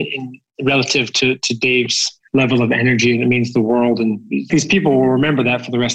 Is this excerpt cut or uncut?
cut